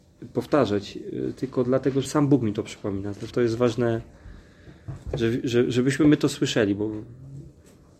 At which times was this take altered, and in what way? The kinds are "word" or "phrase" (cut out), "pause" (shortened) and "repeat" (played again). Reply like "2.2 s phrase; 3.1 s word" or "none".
2.1 s word; 3.3 s word